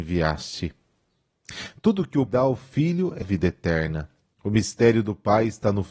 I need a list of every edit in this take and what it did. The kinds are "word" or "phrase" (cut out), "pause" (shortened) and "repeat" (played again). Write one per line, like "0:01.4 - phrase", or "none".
0:02.3 - word
0:03.2 - word
0:04.2 - pause